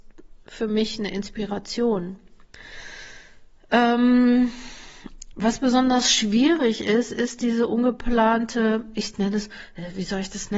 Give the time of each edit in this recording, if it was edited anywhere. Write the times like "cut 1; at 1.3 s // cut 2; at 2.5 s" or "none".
none